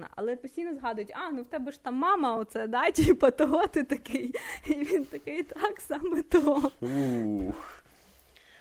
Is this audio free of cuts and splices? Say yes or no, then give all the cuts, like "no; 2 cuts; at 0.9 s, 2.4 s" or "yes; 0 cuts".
yes; 0 cuts